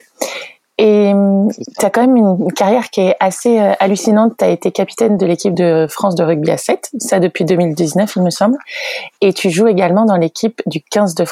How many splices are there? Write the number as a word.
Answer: zero